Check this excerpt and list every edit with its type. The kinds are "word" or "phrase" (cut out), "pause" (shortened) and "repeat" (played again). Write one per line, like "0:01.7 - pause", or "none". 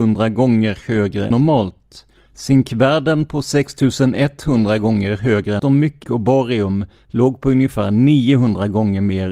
0:01.3 - word
0:02.2 - pause
0:05.6 - phrase
0:06.0 - phrase